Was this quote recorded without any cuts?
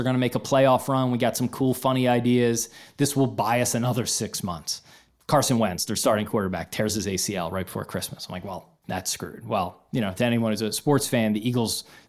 yes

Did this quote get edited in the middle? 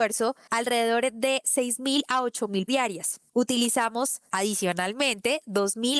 yes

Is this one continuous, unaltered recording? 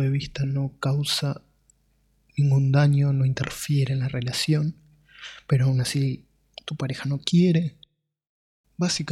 yes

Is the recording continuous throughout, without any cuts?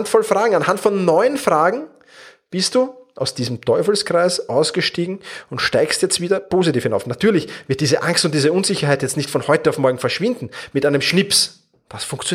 yes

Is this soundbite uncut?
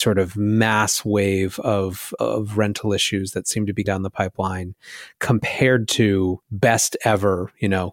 no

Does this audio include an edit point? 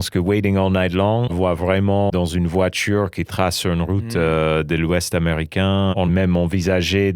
yes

